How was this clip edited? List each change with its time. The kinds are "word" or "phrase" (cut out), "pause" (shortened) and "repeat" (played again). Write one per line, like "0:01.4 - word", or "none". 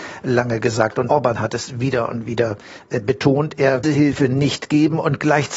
0:01.1 - word
0:03.8 - phrase